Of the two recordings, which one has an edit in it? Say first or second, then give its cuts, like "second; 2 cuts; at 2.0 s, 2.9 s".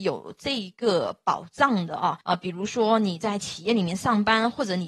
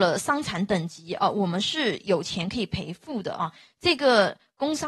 first; 1 cut; at 2.2 s